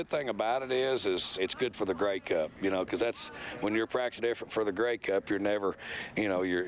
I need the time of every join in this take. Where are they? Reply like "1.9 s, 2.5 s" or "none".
1.4 s, 1.7 s, 4.2 s